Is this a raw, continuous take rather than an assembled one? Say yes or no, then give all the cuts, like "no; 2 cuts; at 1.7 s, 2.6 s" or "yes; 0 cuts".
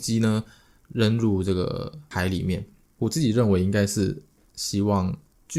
yes; 0 cuts